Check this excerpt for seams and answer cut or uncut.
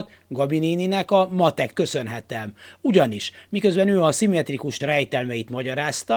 cut